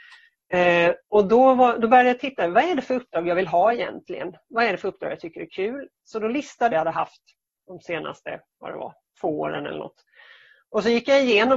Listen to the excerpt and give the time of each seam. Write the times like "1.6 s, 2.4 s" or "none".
6.7 s